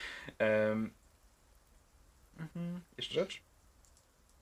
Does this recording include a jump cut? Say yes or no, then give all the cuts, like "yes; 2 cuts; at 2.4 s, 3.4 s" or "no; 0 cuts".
yes; 2 cuts; at 2.5 s, 3.1 s